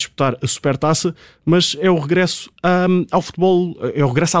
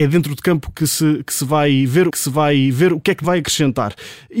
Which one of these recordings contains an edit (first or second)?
second